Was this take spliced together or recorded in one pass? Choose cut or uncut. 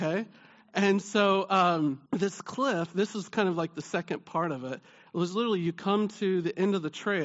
cut